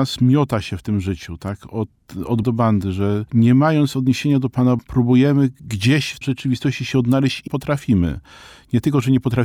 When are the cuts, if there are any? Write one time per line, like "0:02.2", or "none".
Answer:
0:02.4
0:04.8
0:06.2
0:07.5